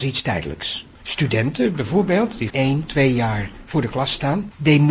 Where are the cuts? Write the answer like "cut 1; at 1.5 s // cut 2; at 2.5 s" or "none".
cut 1; at 0.9 s // cut 2; at 2.5 s // cut 3; at 2.9 s